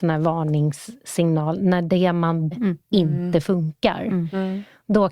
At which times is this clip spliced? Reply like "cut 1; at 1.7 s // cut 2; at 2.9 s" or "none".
cut 1; at 2.5 s